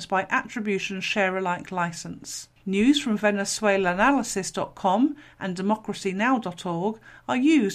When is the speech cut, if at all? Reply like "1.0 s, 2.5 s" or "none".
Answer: 2.6 s